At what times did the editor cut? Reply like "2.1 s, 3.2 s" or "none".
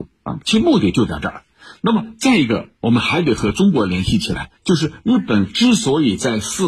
2.8 s, 4.5 s